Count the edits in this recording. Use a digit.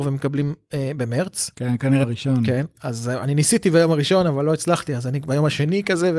2